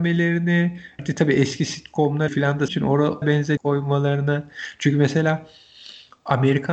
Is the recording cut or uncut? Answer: cut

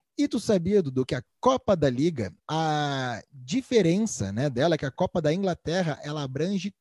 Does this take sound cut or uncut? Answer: cut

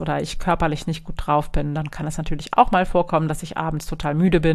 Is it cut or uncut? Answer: uncut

